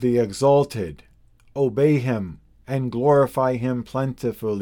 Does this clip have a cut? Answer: no; 0 cuts

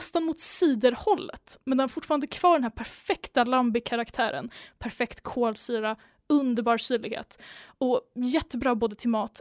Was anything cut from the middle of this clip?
no; 0 cuts

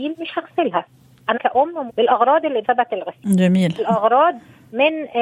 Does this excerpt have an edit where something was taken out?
yes; 4 cuts; at 1.3 s, 1.9 s, 2.6 s, 3.8 s

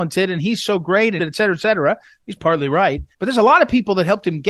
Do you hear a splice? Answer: yes; 3 cuts; at 1.2 s, 2.4 s, 3.1 s

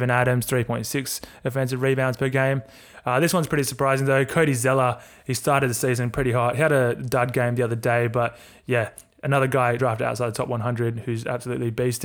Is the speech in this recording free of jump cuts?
no; 1 cut; at 9.8 s

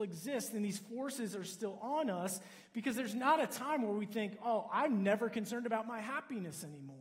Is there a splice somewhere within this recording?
no; 0 cuts

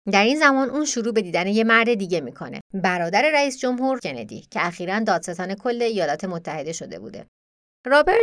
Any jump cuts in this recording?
yes; 2 cuts; at 2.6 s, 4.0 s

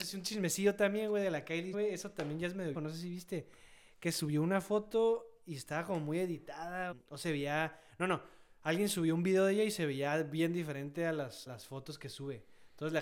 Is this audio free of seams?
no; 4 cuts; at 1.7 s, 2.7 s, 6.9 s, 11.5 s

